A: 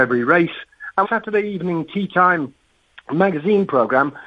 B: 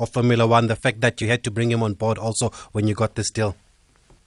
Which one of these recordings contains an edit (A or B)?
A